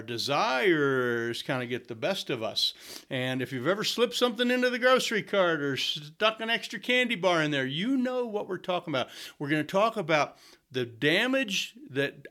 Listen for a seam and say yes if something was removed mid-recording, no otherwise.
no